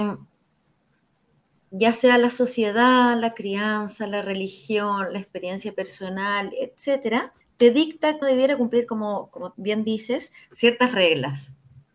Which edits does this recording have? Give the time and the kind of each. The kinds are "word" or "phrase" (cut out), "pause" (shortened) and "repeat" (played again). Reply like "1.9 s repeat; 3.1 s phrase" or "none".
7.4 s pause; 8.2 s phrase